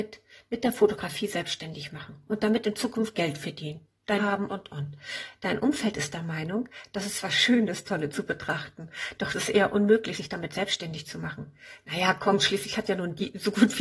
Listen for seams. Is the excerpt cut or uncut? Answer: cut